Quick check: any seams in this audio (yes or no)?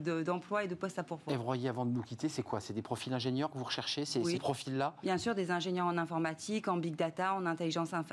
yes